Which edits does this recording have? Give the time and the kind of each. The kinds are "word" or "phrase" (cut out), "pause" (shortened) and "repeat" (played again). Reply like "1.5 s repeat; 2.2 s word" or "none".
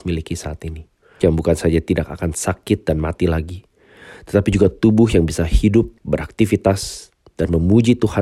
1.2 s word; 6.0 s pause